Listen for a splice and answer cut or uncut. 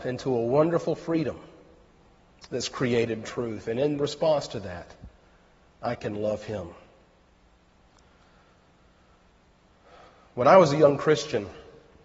cut